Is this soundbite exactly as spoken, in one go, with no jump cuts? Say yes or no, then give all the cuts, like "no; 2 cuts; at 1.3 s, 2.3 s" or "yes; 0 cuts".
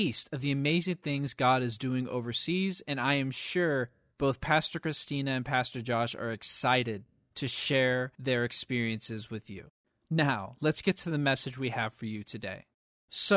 yes; 0 cuts